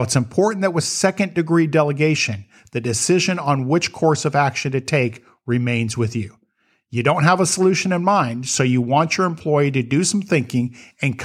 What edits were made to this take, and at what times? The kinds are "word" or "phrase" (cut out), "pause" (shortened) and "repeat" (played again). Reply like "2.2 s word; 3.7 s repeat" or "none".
none